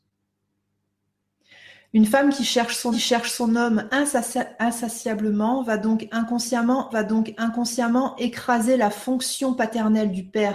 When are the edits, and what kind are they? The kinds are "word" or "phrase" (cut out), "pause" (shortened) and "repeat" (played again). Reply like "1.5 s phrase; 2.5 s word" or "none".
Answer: 2.9 s repeat; 6.9 s repeat